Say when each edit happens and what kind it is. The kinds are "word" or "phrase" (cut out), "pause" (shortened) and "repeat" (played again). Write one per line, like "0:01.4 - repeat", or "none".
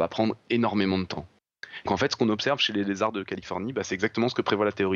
0:01.9 - word